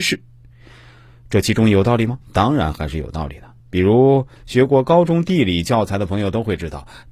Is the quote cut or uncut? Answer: cut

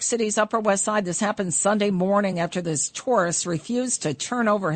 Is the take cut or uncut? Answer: uncut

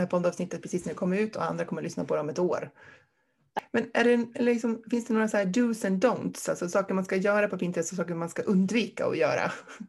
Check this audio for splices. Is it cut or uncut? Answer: uncut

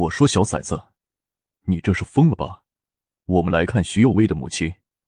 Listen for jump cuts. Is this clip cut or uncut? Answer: uncut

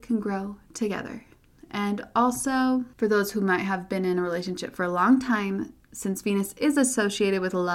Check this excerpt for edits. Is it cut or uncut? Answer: uncut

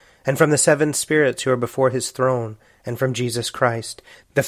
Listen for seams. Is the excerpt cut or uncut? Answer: uncut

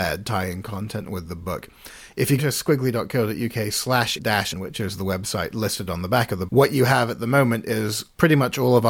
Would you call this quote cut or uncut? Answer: cut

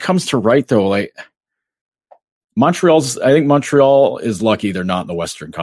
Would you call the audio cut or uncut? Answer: uncut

